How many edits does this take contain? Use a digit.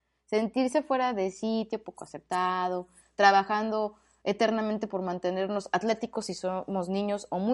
0